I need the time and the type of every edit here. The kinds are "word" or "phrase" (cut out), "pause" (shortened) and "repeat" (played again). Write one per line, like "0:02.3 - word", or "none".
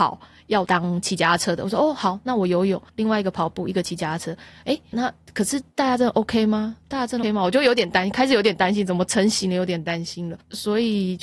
0:02.9 - pause
0:04.9 - word
0:07.2 - word